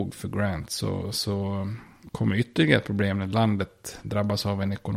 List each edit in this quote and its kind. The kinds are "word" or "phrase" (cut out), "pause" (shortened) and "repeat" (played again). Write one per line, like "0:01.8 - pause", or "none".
none